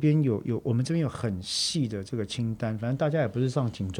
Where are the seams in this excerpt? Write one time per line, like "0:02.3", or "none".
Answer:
none